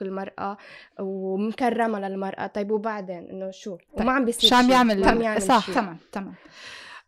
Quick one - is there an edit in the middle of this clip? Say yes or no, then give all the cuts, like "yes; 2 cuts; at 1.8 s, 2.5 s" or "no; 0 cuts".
yes; 1 cut; at 3.9 s